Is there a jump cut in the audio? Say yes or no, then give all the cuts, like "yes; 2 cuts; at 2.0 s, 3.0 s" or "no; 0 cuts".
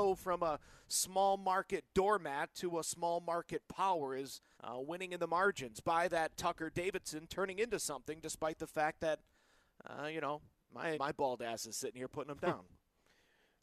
yes; 2 cuts; at 4.5 s, 10.9 s